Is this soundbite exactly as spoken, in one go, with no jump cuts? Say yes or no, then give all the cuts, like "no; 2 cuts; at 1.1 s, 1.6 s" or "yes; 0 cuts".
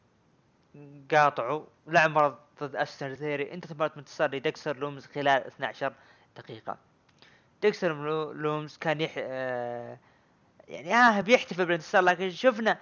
yes; 0 cuts